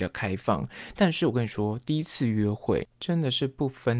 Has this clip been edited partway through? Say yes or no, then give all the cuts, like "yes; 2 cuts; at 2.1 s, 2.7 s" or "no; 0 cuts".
yes; 1 cut; at 2.9 s